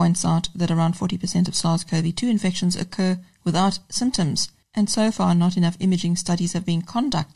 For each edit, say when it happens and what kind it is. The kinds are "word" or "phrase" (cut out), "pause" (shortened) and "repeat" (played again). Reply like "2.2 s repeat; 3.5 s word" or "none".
none